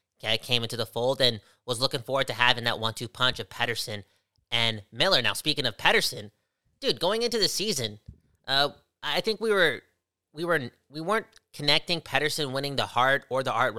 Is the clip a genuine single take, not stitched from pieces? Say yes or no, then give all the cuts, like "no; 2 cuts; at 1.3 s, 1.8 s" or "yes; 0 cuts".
yes; 0 cuts